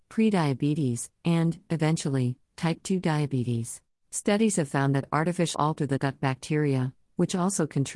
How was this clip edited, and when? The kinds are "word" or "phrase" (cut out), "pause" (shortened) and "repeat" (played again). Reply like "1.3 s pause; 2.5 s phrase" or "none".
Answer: 3.9 s pause; 5.5 s phrase; 6.0 s word